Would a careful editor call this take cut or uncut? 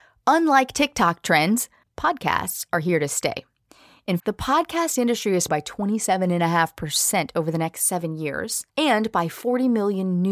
cut